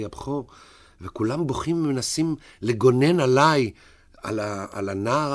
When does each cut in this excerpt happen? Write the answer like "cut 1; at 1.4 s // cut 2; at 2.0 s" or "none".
none